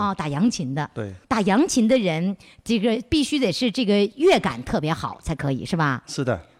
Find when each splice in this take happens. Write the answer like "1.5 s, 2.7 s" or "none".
1.2 s